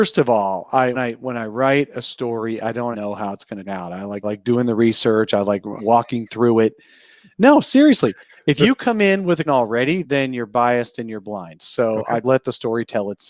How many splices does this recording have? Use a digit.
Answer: 8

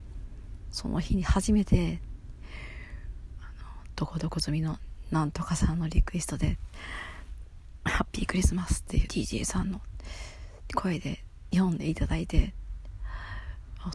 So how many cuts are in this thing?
1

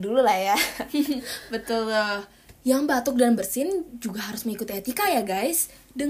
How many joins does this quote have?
0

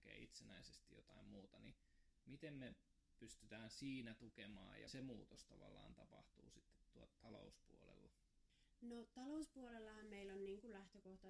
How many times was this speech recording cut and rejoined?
1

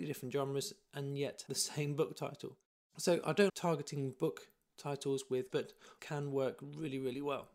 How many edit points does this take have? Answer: 4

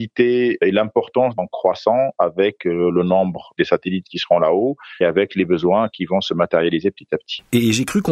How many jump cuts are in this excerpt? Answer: 2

